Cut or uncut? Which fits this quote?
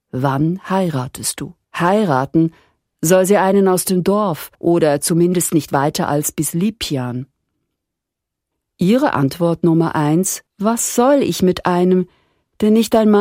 cut